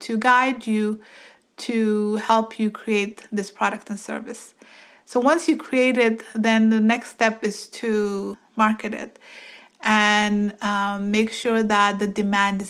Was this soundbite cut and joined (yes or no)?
no